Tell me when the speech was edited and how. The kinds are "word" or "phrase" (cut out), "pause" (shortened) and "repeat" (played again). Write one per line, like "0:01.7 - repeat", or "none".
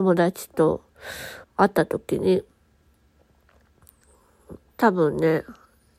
0:01.4 - pause